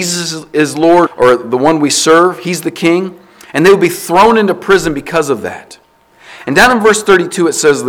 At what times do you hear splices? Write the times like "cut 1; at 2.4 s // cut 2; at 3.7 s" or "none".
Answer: cut 1; at 1.1 s